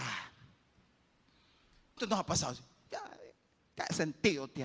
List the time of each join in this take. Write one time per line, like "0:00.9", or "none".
0:02.0